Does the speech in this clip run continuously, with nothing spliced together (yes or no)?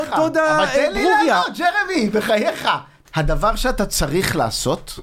no